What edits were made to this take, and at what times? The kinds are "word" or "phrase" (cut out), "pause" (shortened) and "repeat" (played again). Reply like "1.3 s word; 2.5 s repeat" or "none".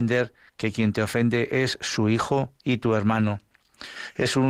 2.6 s pause